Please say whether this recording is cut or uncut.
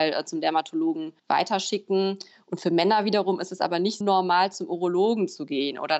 cut